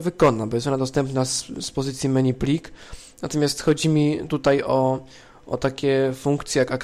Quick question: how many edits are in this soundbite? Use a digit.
0